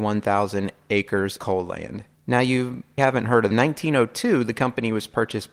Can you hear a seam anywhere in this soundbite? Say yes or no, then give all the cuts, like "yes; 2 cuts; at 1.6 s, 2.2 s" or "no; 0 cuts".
yes; 4 cuts; at 1.4 s, 2.1 s, 3.0 s, 3.5 s